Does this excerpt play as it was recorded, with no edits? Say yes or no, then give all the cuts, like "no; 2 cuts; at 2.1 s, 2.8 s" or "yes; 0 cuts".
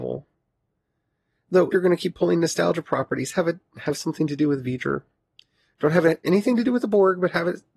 no; 2 cuts; at 1.7 s, 6.2 s